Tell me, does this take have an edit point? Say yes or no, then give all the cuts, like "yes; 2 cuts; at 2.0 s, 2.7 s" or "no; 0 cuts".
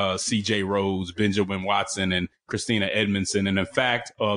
no; 0 cuts